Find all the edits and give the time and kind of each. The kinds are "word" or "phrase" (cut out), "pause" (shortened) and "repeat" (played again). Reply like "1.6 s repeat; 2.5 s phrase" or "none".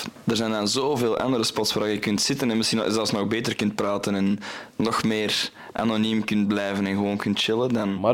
none